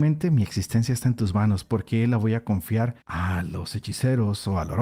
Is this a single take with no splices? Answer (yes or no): no